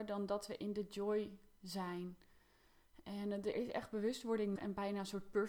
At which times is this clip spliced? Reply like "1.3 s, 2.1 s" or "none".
3.5 s, 4.6 s